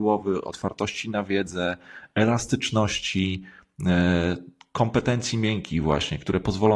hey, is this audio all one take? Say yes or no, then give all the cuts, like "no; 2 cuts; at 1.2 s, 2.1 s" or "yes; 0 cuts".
yes; 0 cuts